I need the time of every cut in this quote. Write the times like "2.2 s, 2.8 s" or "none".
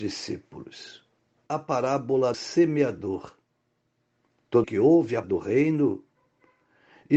1.5 s, 2.3 s, 4.6 s, 5.2 s